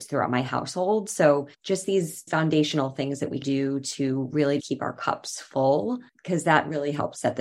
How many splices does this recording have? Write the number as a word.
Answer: four